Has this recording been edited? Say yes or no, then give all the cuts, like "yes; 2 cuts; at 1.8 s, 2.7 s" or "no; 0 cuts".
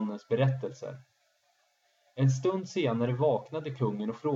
no; 0 cuts